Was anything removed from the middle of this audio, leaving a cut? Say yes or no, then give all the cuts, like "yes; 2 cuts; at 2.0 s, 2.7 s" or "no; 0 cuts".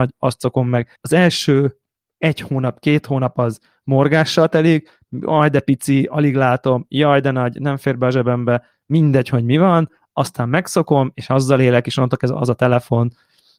yes; 1 cut; at 1.0 s